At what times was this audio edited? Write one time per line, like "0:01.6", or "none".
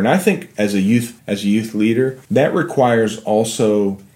0:01.2
0:02.2

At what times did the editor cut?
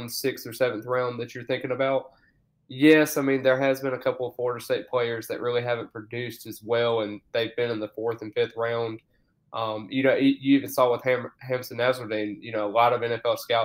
none

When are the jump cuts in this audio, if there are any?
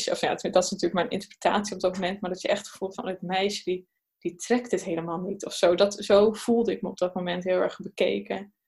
none

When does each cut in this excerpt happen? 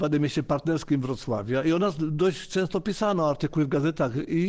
none

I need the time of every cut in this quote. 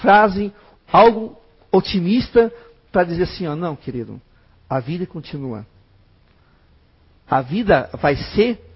none

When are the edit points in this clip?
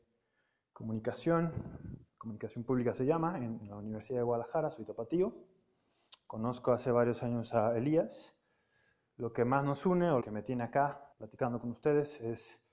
0:02.1
0:10.2
0:11.1

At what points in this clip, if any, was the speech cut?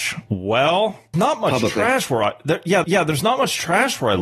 0:01.1
0:02.8

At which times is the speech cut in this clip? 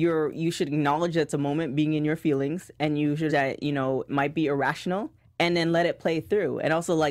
0:03.3
0:04.1
0:05.2

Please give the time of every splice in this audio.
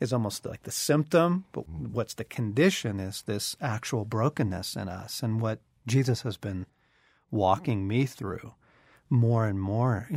none

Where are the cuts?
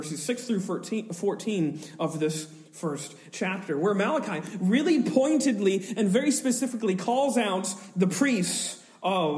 none

